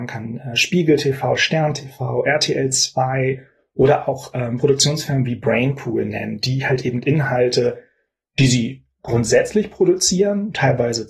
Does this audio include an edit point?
no; 0 cuts

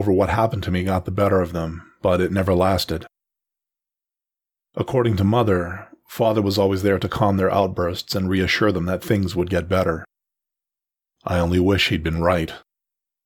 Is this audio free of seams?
yes; 0 cuts

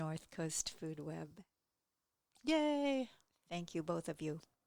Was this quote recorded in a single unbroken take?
yes; 0 cuts

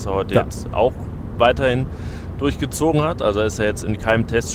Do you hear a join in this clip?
no; 0 cuts

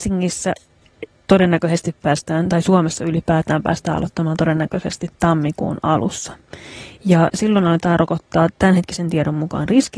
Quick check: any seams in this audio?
no; 0 cuts

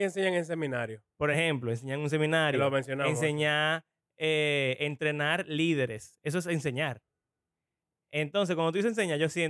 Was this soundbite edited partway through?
no; 0 cuts

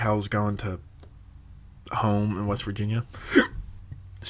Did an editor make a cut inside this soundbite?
no; 0 cuts

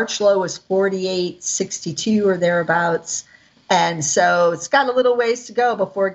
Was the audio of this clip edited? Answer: no; 0 cuts

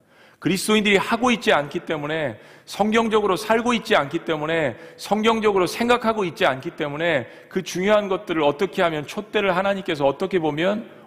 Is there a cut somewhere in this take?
no; 0 cuts

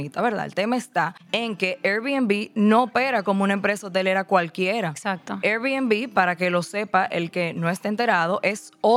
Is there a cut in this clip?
no; 0 cuts

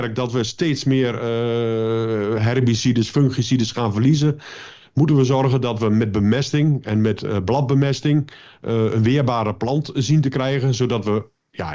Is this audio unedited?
yes; 0 cuts

